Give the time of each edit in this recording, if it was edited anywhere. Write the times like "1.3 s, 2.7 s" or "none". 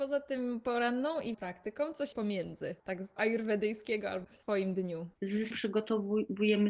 1.3 s, 2.1 s, 3.2 s, 4.2 s, 5.5 s